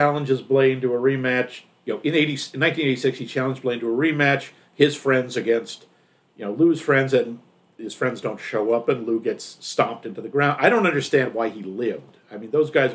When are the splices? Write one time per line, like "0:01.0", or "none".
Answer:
none